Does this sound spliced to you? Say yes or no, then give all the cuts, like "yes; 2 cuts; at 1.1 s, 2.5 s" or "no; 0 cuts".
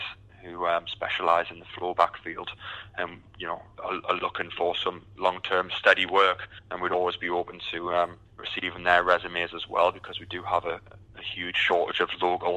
yes; 2 cuts; at 6.6 s, 8.3 s